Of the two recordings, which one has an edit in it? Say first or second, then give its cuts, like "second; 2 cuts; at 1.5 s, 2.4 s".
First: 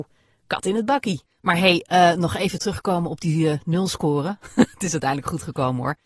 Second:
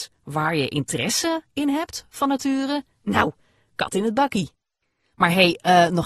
first; 1 cut; at 1.2 s